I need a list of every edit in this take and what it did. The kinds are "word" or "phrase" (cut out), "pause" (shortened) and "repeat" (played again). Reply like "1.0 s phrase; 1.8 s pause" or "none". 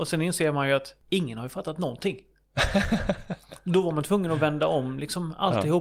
none